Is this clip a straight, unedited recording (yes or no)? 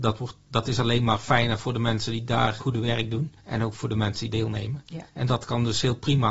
no